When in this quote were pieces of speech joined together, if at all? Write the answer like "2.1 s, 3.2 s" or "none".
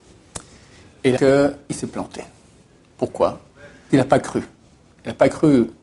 1.2 s, 3.9 s